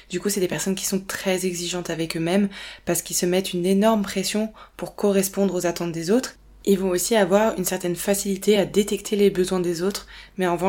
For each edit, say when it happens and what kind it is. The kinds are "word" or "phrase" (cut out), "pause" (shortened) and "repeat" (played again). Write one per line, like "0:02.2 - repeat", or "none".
none

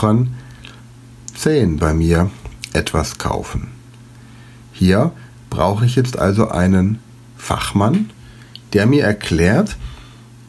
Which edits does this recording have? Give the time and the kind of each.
0:01.8 - phrase

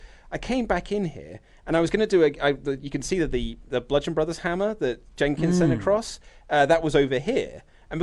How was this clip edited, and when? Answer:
none

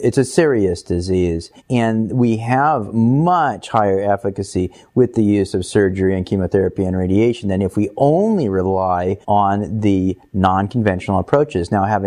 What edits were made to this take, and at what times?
0:01.6 - pause
0:09.2 - pause

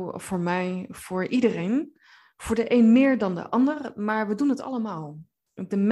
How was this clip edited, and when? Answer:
none

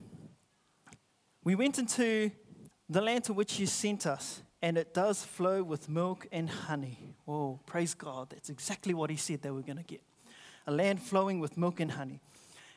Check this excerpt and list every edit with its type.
0:01.1 - pause
0:02.7 - pause

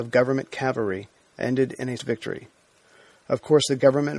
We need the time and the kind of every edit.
0:02.0 - word

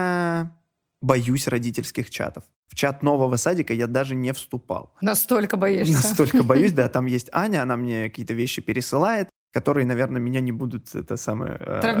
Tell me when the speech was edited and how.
none

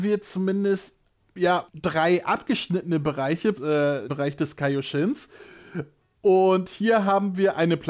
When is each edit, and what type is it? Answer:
0:01.7 - word
0:03.5 - word
0:04.1 - word

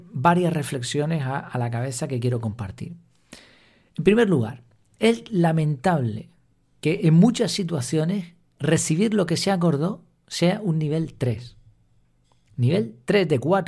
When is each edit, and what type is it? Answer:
none

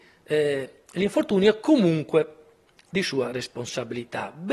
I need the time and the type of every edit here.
none

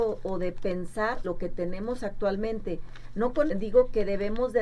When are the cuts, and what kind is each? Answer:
0:01.2 - word
0:03.5 - word

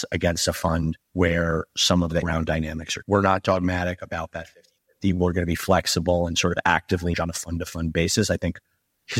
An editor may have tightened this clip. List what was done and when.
0:01.0 - pause
0:02.2 - word
0:03.0 - word
0:07.1 - word

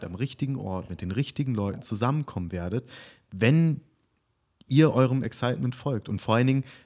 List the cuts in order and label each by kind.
none

